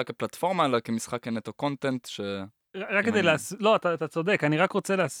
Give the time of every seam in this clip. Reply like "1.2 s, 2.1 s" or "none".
none